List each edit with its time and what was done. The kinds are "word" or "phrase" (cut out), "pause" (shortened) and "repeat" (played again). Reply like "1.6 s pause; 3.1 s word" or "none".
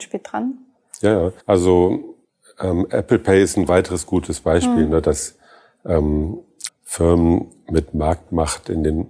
1.4 s pause; 6.7 s phrase